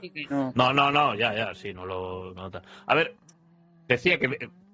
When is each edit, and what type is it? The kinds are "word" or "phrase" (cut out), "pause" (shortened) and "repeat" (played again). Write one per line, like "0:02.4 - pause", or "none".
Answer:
none